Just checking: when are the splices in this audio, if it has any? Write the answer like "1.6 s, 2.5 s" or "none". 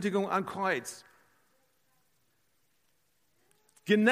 none